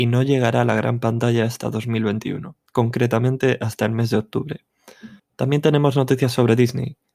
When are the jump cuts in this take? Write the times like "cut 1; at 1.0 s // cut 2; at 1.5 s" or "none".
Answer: cut 1; at 2.7 s // cut 2; at 5.2 s